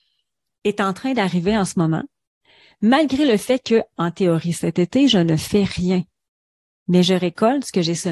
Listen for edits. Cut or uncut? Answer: uncut